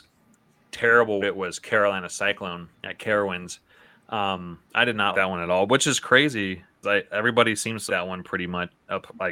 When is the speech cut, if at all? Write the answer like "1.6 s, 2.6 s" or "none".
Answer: 1.2 s, 2.7 s, 4.6 s, 5.1 s, 6.8 s, 7.9 s